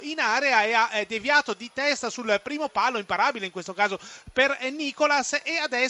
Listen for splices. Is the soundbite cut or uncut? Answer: uncut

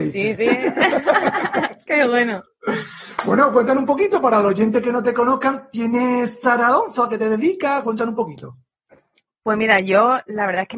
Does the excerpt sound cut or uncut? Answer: uncut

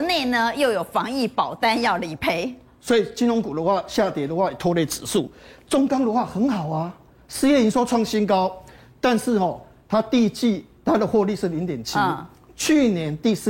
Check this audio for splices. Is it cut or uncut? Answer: uncut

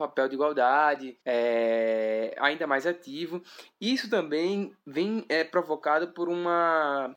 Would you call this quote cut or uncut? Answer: cut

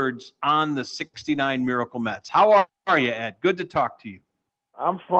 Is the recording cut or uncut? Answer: uncut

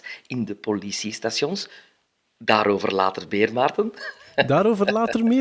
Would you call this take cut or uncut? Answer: uncut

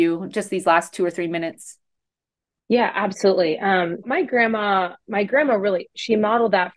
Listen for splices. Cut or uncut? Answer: cut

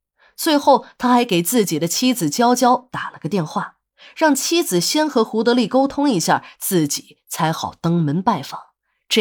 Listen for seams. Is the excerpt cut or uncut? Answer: uncut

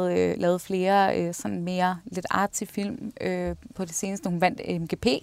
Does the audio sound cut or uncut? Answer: uncut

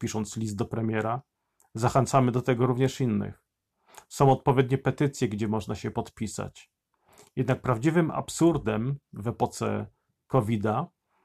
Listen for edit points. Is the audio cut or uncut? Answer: uncut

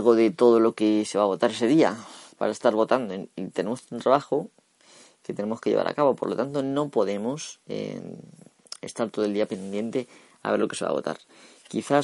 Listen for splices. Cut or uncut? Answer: uncut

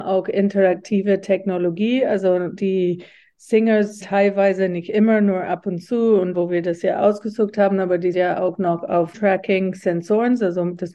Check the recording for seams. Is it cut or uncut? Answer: cut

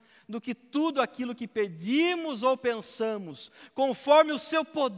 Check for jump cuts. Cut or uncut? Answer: uncut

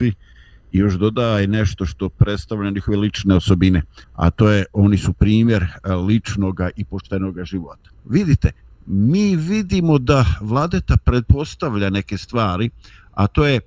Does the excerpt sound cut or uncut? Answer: cut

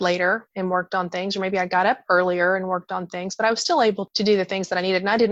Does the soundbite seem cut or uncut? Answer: uncut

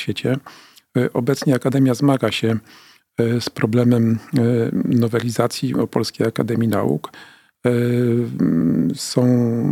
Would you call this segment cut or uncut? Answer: cut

